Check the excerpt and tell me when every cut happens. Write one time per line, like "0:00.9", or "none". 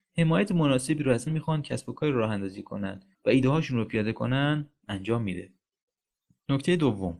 0:01.3
0:03.1